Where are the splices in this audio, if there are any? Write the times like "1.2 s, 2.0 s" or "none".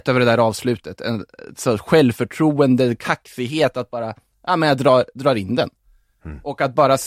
none